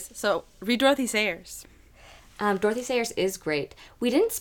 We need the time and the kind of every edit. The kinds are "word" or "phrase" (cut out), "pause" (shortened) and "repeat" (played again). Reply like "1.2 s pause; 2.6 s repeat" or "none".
2.2 s pause